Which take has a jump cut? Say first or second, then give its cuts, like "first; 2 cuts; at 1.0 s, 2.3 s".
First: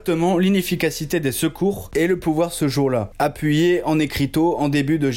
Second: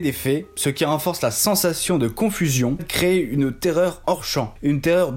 second; 2 cuts; at 2.8 s, 4.0 s